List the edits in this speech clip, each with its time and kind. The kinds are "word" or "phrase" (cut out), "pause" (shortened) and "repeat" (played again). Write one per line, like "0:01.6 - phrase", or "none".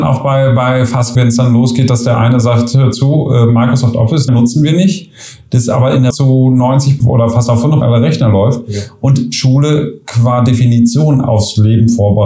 0:01.2 - word
0:04.3 - word
0:06.1 - word
0:07.0 - word
0:07.8 - word